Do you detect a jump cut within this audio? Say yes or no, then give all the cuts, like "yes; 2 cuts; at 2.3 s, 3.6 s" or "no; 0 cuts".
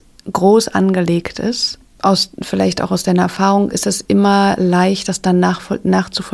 no; 0 cuts